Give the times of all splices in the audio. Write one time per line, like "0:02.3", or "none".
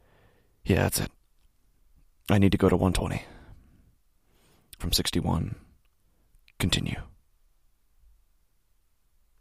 0:04.8